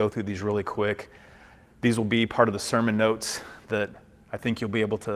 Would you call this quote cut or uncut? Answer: uncut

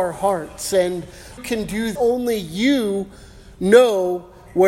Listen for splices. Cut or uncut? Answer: cut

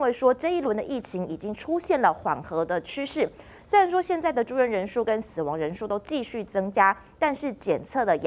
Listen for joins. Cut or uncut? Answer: uncut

